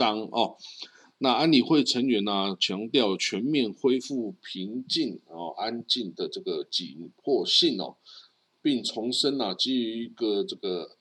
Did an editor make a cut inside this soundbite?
no; 0 cuts

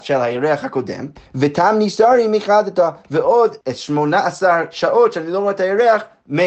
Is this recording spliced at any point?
yes; 2 cuts; at 1.2 s, 3.6 s

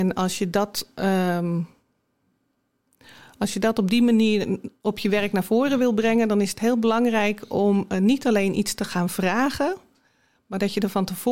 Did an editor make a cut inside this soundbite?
no; 0 cuts

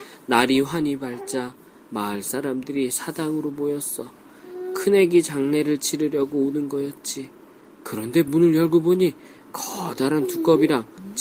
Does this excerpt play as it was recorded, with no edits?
yes; 0 cuts

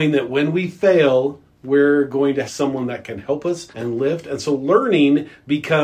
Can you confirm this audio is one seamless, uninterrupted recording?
no; 2 cuts; at 2.4 s, 3.7 s

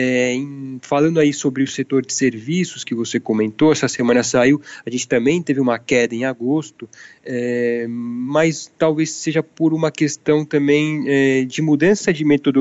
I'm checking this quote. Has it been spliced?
no; 0 cuts

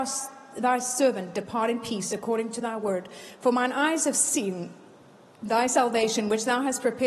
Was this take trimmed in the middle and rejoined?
no; 0 cuts

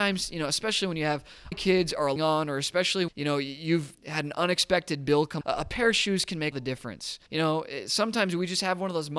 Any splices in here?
yes; 7 cuts; at 1.5 s, 2.2 s, 3.1 s, 4.0 s, 5.4 s, 6.5 s, 7.3 s

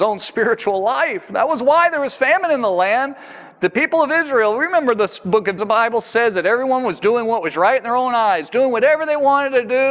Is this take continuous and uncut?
no; 1 cut; at 5.6 s

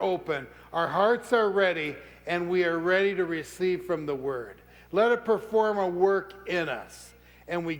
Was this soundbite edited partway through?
no; 0 cuts

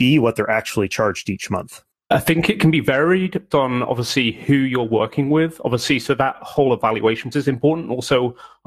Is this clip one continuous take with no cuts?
no; 2 cuts; at 3.5 s, 7.3 s

